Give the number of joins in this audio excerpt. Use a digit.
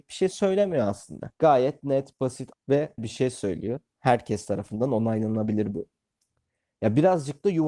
3